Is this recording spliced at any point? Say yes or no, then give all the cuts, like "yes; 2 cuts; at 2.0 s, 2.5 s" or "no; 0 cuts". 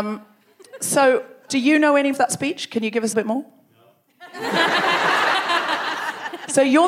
yes; 3 cuts; at 1.5 s, 2.1 s, 3.1 s